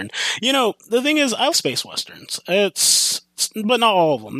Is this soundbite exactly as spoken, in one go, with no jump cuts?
no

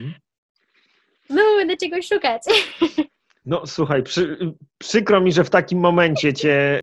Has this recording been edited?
no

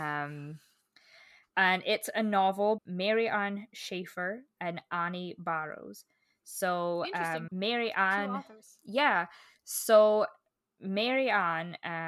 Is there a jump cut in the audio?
yes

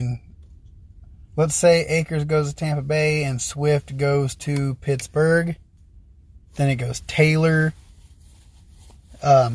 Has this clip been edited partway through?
yes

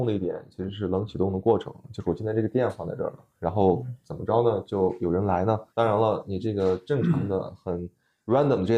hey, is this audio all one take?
no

